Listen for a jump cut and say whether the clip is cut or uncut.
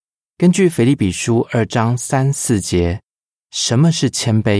uncut